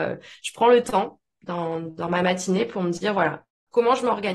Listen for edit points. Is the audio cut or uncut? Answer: uncut